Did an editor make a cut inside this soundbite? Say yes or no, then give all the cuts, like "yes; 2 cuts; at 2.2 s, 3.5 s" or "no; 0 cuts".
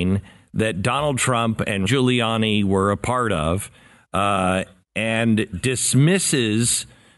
yes; 2 cuts; at 1.8 s, 5.5 s